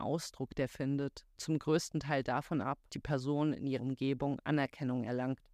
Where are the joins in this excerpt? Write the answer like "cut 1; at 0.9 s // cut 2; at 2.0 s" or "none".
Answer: cut 1; at 1.4 s // cut 2; at 2.9 s // cut 3; at 3.8 s